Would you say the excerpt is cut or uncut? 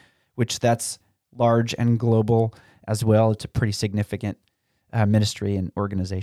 uncut